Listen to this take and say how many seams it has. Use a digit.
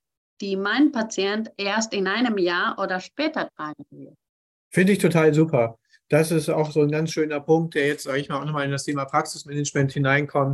0